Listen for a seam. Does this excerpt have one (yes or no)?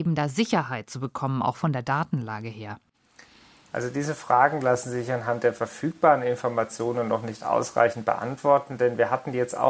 no